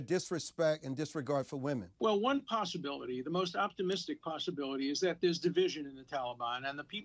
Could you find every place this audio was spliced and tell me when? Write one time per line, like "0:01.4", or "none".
0:01.9

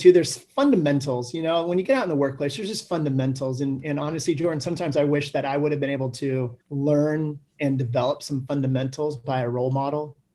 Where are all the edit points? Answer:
0:06.6

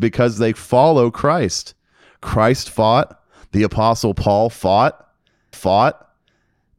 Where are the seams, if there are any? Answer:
0:05.5

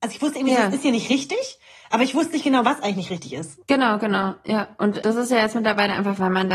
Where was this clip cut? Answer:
0:05.0

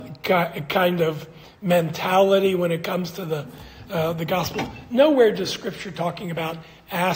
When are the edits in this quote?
none

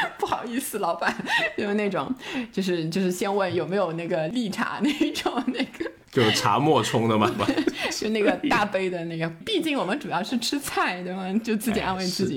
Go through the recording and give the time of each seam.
0:07.4
0:09.4

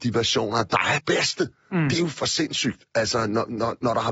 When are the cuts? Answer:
0:01.0

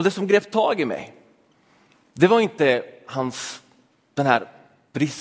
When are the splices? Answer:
none

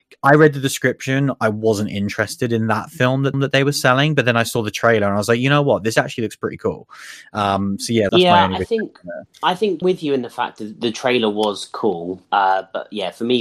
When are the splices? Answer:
0:03.3
0:08.1
0:09.3
0:09.8
0:12.2

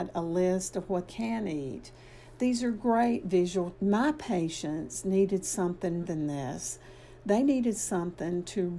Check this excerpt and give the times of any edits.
0:01.1
0:03.7
0:06.0

